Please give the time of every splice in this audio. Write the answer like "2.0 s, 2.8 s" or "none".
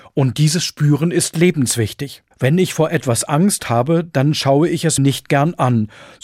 2.3 s, 5.0 s